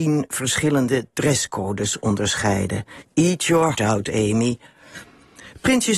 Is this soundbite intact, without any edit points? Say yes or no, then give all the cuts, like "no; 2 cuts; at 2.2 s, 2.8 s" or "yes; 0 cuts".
no; 1 cut; at 3.7 s